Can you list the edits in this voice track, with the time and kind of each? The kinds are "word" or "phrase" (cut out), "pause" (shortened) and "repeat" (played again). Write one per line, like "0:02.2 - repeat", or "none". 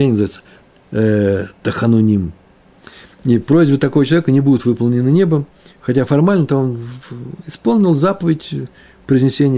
none